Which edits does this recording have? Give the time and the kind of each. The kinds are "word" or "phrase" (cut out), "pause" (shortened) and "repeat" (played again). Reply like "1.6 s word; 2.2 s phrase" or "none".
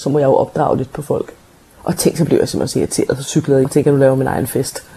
3.6 s word